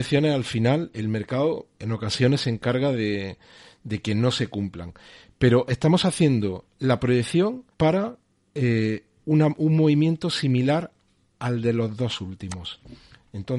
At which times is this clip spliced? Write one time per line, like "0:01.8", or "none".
0:07.7